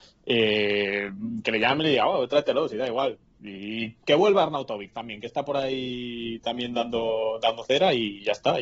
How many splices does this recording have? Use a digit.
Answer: 0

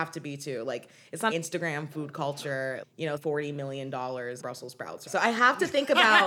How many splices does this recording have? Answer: 5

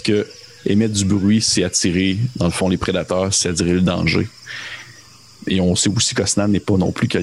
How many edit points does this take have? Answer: 0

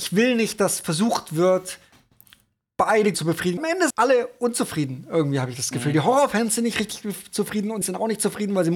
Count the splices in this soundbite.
4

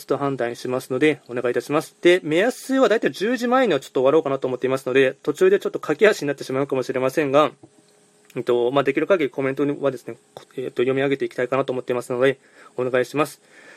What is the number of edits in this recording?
2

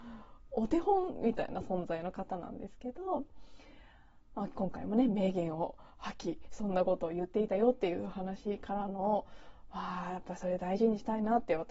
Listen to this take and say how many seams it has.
0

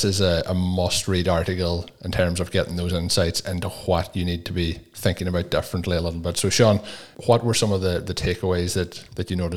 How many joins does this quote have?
1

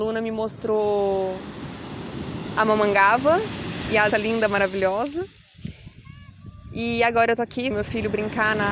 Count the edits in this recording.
2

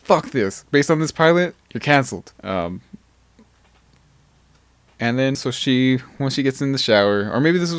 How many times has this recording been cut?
2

